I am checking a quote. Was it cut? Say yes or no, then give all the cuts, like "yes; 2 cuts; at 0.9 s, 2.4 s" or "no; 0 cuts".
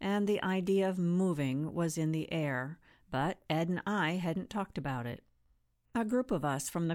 no; 0 cuts